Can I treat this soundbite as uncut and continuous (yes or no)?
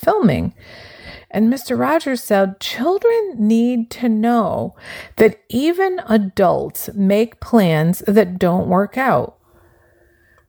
yes